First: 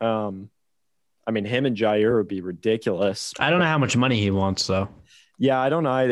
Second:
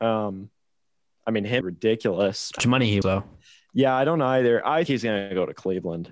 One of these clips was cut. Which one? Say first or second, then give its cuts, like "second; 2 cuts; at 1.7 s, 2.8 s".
second; 4 cuts; at 1.6 s, 2.6 s, 3.0 s, 4.9 s